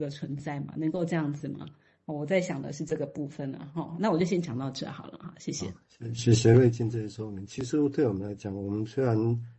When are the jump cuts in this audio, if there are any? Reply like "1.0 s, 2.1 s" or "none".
none